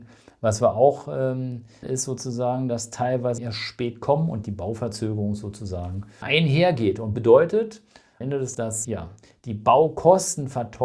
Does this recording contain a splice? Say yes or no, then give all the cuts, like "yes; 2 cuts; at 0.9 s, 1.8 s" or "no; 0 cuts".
yes; 8 cuts; at 1.8 s, 3.4 s, 4.4 s, 6.2 s, 7.1 s, 8.2 s, 8.5 s, 8.8 s